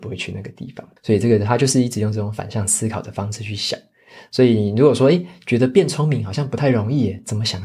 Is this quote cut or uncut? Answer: cut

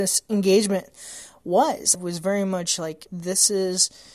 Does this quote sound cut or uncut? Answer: cut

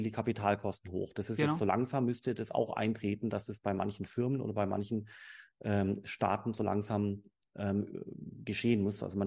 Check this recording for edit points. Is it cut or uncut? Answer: uncut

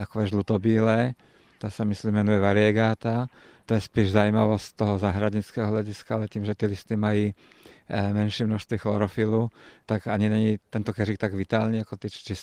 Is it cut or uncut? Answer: uncut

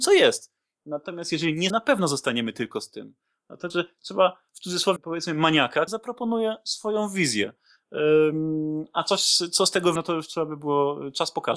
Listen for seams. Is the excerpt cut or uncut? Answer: cut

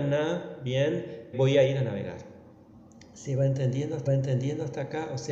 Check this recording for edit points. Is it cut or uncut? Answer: cut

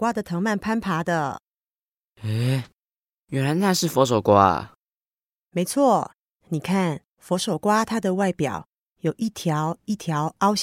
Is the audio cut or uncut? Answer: cut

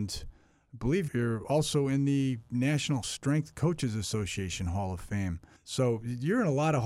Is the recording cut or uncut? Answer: cut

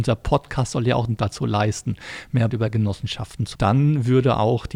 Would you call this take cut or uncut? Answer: cut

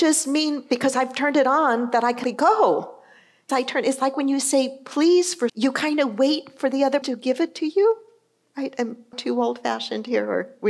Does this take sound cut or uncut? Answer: cut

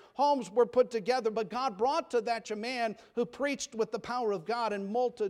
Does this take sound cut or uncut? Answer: cut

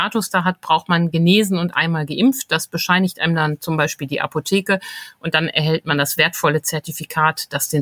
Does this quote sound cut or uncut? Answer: uncut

